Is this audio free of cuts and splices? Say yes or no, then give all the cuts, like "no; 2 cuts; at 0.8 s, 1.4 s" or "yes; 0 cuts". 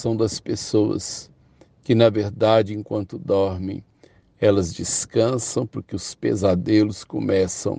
yes; 0 cuts